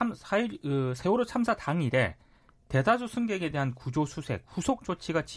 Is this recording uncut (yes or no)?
yes